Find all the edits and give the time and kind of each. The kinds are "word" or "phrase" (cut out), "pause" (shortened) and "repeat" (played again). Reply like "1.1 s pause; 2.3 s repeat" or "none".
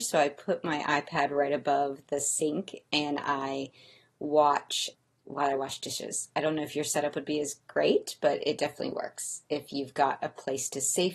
none

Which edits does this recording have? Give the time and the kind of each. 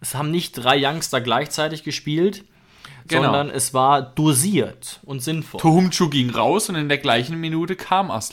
none

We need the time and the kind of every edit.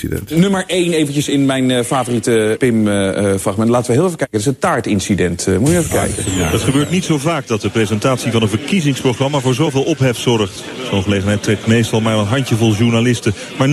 2.6 s word

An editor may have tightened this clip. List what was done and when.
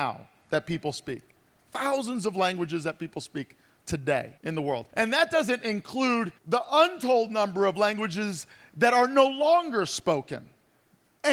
4.4 s pause; 4.9 s pause; 6.4 s pause

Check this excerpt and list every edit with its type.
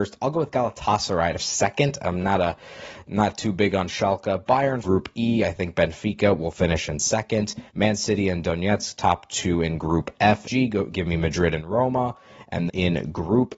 1.4 s word; 4.8 s phrase; 7.7 s pause; 10.4 s phrase; 12.7 s word

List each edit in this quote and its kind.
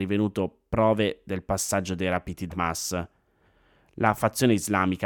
2.5 s word

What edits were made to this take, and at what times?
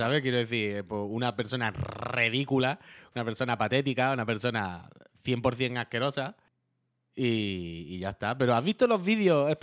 none

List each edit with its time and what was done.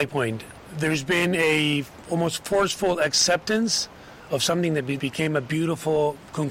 5.0 s word

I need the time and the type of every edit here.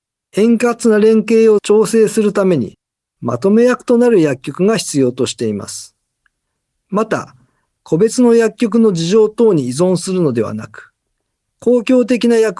none

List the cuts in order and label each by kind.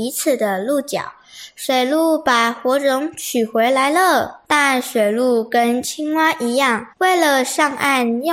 6.9 s pause

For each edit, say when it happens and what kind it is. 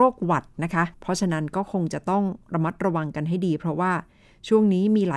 0.9 s pause

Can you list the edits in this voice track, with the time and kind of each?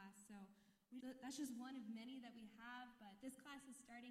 1.0 s word

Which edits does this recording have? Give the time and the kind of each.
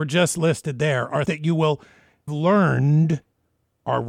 1.3 s word; 2.3 s word

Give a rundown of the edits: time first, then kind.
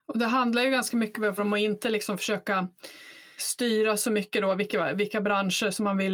1.4 s word; 3.4 s word

